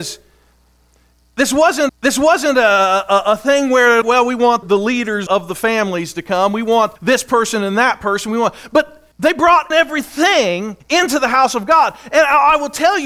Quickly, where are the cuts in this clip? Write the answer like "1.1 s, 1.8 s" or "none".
1.9 s, 4.0 s, 4.6 s, 5.3 s, 7.0 s, 9.1 s, 9.7 s, 10.8 s